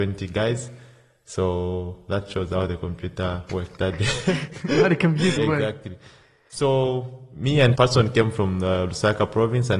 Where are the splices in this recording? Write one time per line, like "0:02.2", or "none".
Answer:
0:03.5
0:05.4
0:07.8